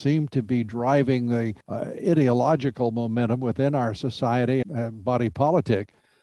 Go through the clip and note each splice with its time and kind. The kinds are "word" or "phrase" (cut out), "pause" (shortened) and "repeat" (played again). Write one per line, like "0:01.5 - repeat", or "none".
0:01.6 - pause
0:04.6 - word